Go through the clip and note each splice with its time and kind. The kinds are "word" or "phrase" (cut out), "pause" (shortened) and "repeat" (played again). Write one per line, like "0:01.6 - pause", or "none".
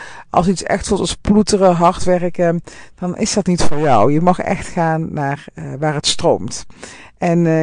none